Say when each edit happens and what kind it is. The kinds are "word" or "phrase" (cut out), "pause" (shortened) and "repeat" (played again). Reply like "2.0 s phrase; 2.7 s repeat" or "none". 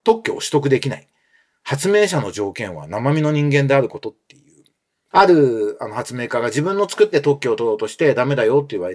7.1 s word